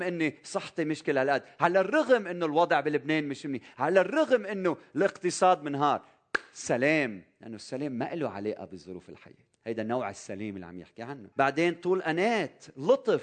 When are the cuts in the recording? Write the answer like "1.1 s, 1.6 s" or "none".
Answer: 9.5 s, 11.3 s